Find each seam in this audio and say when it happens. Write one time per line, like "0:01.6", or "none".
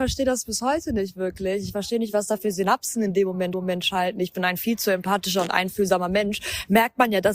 0:03.5